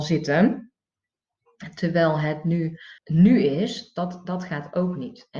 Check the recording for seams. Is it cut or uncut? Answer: cut